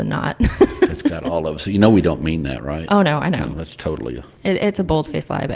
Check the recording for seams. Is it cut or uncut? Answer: uncut